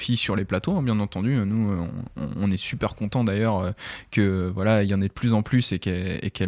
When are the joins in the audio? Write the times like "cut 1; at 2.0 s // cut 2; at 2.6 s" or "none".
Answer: none